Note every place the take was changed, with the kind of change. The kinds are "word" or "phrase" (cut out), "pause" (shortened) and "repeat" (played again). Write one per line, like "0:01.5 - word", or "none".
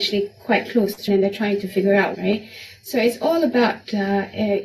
0:01.1 - word
0:02.1 - phrase